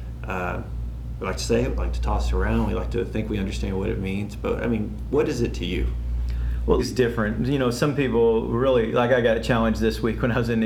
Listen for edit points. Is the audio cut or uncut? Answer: cut